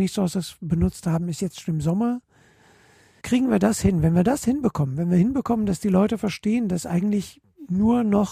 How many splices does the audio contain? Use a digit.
0